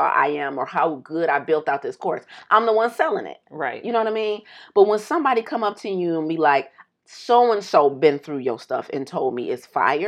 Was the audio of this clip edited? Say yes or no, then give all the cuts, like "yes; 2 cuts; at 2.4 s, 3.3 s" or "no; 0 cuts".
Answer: no; 0 cuts